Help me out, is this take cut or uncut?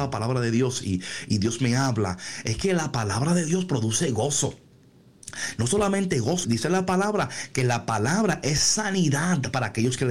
cut